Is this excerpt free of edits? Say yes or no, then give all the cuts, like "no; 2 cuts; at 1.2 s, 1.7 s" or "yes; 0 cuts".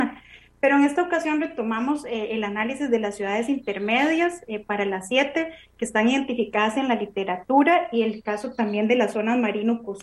yes; 0 cuts